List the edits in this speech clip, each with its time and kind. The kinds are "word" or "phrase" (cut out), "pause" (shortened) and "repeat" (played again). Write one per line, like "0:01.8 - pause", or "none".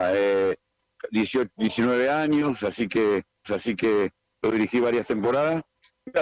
0:03.4 - repeat